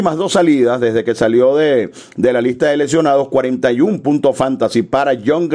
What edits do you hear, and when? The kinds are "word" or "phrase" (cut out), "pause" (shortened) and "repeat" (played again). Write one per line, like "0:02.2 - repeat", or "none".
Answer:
none